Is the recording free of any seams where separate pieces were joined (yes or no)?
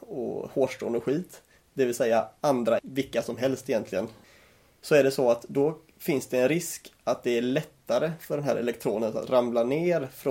no